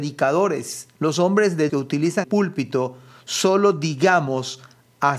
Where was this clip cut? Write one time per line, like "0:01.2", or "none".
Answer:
0:00.9
0:01.7
0:02.2